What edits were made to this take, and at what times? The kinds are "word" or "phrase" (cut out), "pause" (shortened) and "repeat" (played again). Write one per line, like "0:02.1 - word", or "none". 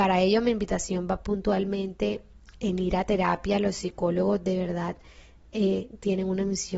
none